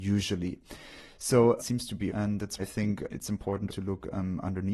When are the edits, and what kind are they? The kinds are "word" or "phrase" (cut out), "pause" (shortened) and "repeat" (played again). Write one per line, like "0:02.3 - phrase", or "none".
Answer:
0:01.6 - word
0:02.1 - word
0:02.6 - word
0:03.1 - word
0:03.7 - word